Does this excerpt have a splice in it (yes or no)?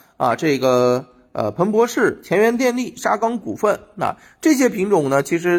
no